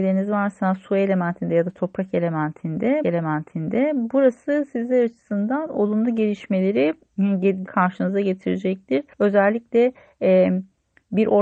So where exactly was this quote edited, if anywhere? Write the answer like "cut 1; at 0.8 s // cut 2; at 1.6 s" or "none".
cut 1; at 3.0 s // cut 2; at 7.6 s // cut 3; at 9.1 s